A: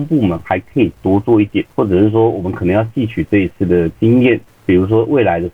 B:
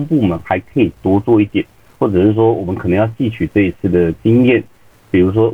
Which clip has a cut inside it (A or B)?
A